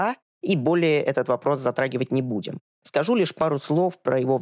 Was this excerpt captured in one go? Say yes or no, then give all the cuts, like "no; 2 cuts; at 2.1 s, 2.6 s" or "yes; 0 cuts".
yes; 0 cuts